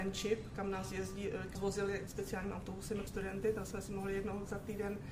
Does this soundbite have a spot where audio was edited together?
yes; 3 cuts; at 1.5 s, 2.1 s, 3.1 s

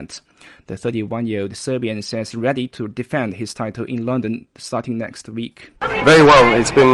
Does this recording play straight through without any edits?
no; 1 cut; at 2.3 s

